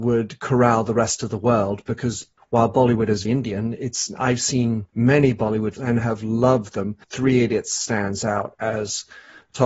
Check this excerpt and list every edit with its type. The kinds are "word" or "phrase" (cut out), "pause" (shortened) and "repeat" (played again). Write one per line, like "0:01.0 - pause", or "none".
0:02.4 - pause
0:03.2 - word
0:04.9 - pause
0:05.8 - word
0:07.0 - pause